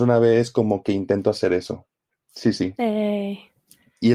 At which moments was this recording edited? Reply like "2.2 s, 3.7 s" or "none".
none